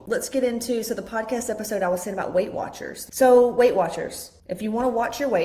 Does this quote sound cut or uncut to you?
cut